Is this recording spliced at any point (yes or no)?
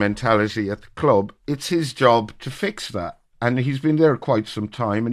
no